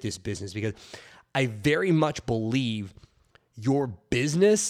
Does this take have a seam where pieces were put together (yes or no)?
no